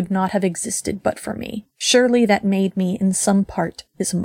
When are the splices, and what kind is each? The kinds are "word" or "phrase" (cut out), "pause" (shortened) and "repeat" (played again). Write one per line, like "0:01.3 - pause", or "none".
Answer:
0:01.7 - pause